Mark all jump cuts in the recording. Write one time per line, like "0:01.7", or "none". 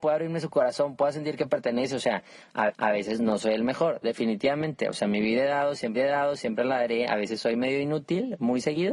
0:02.7
0:06.0

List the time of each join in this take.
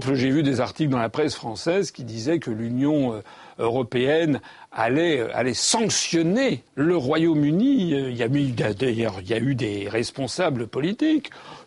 0:06.7

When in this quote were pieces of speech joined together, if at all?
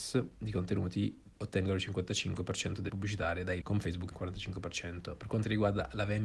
0:01.3
0:02.9
0:03.6
0:04.1

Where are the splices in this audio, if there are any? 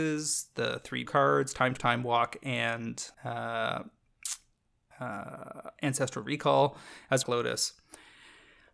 0:01.1
0:01.8
0:03.1
0:07.2

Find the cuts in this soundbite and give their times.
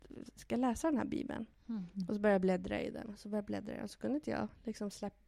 none

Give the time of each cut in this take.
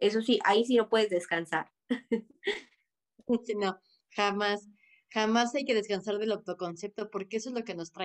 none

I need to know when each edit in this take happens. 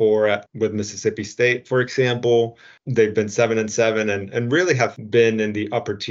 none

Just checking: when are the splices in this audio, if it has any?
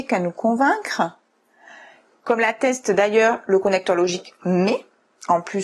none

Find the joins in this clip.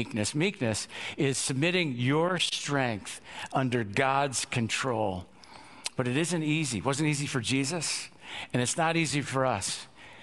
none

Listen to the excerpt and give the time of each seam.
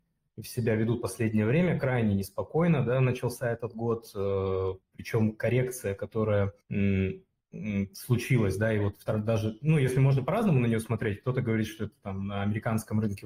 0:04.8

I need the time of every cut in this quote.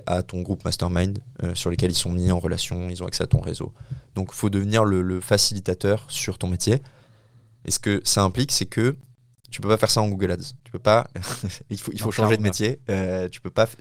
0:10.6

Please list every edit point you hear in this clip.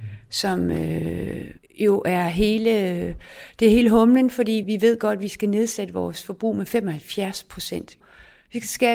0:01.6

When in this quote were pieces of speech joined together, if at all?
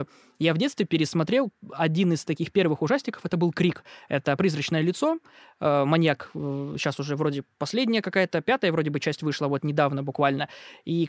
none

